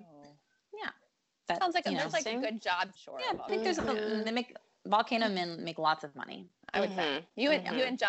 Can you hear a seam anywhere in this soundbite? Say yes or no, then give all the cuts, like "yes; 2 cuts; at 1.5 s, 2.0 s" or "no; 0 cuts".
yes; 1 cut; at 2.9 s